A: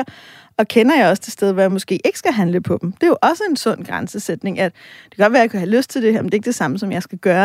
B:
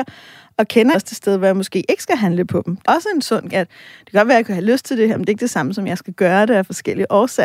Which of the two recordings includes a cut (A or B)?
B